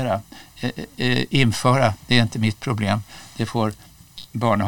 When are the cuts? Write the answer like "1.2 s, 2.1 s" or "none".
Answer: none